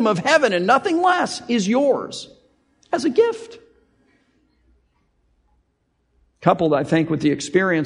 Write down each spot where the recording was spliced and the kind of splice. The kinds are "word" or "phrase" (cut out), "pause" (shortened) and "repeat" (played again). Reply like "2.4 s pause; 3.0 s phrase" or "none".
none